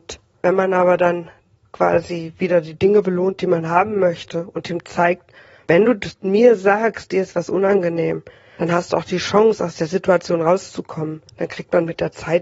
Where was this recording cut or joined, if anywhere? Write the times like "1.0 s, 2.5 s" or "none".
none

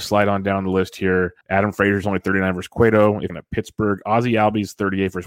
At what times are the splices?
1.4 s, 3.3 s

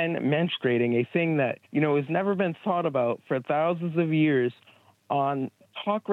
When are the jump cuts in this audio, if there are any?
1.6 s

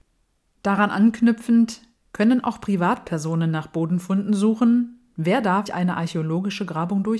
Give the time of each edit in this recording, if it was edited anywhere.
5.7 s

